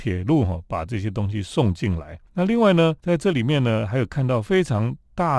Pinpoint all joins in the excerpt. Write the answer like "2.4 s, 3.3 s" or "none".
2.3 s, 3.0 s